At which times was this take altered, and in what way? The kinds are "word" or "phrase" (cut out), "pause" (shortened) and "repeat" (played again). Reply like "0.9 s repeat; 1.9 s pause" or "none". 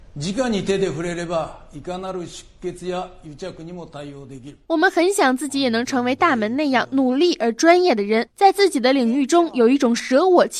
4.6 s pause